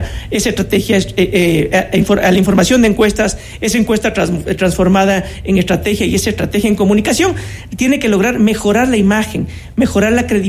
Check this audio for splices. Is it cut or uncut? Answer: uncut